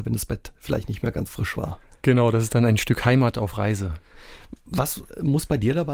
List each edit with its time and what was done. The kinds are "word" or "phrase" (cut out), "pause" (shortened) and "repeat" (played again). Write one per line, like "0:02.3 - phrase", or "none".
0:01.3 - word